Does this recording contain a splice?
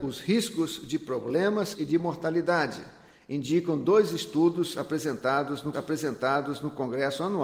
yes; 2 cuts; at 1.7 s, 5.7 s

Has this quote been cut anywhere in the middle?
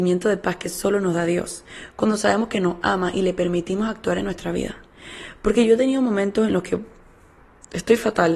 no; 0 cuts

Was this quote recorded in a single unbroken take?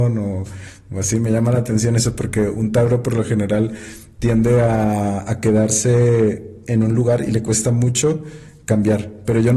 yes; 0 cuts

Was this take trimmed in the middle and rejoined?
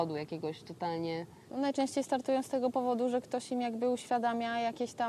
yes; 1 cut; at 1.5 s

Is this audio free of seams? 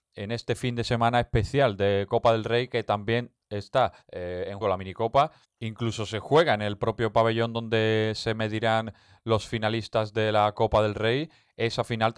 no; 3 cuts; at 4.0 s, 4.6 s, 5.4 s

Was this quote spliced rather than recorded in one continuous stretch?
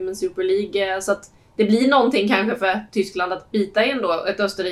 no; 0 cuts

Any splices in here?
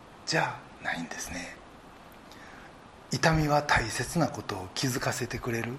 no; 0 cuts

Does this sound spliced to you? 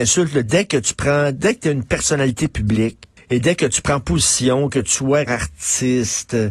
yes; 2 cuts; at 3.2 s, 5.3 s

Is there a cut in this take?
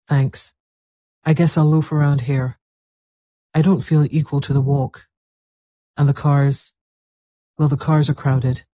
no; 0 cuts

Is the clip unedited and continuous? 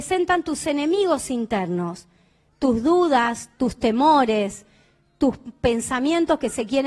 yes; 0 cuts

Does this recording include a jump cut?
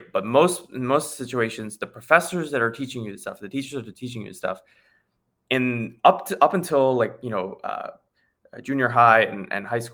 no; 0 cuts

